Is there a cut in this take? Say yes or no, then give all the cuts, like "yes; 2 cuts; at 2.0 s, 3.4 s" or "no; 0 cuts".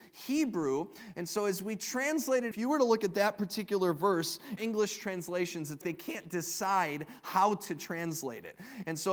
yes; 3 cuts; at 2.5 s, 4.6 s, 5.8 s